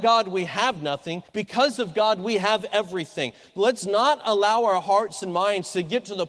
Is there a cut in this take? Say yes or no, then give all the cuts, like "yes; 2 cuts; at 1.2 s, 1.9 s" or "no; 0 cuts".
yes; 1 cut; at 1.3 s